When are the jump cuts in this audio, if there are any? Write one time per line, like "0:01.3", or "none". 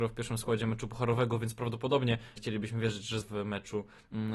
0:02.4
0:03.2